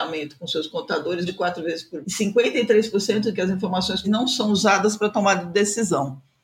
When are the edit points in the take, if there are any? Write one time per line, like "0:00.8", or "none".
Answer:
0:01.3
0:02.0
0:03.3
0:04.0